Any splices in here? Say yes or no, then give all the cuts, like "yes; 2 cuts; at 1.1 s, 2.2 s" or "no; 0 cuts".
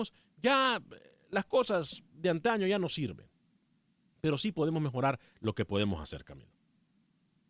no; 0 cuts